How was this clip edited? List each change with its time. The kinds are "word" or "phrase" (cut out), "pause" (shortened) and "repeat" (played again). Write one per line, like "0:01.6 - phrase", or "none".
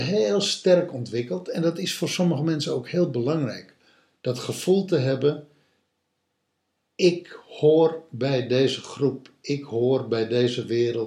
none